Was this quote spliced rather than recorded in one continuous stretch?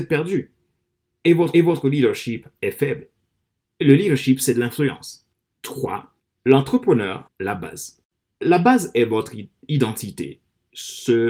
yes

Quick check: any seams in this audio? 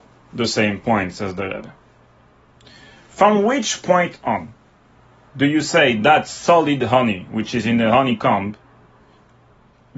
no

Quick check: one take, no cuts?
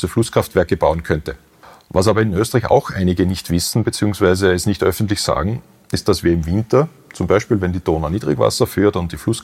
yes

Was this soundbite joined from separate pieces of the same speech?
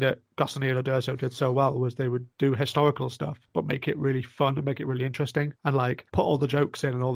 yes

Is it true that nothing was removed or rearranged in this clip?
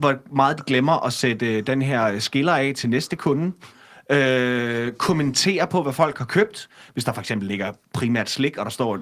yes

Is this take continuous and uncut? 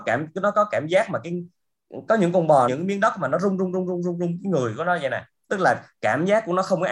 no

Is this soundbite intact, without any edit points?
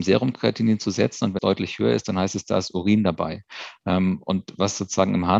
no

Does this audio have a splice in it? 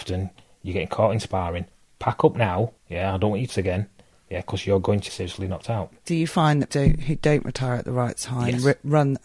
yes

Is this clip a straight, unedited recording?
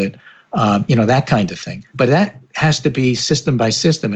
no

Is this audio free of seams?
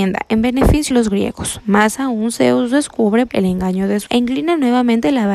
no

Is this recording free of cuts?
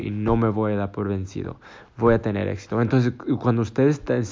yes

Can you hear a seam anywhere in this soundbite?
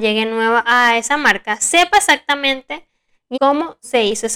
yes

